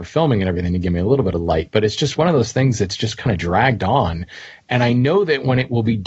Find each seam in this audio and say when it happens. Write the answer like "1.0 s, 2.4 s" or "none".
none